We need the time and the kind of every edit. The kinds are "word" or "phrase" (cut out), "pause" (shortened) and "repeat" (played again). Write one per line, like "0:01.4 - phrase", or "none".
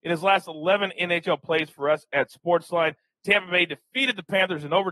none